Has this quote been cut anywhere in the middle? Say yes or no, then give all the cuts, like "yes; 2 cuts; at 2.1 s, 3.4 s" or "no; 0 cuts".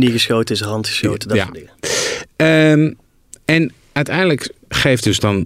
no; 0 cuts